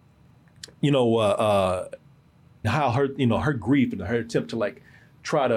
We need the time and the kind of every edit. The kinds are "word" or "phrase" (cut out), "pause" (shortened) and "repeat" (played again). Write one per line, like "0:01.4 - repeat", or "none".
0:02.6 - phrase